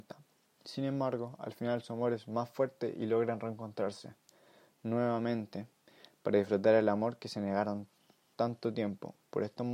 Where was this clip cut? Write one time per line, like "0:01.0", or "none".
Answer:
none